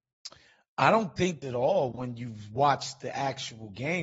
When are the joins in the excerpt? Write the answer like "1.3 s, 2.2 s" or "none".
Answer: 1.4 s